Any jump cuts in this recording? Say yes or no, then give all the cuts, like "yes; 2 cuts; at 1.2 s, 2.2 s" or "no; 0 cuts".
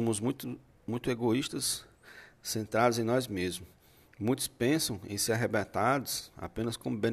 no; 0 cuts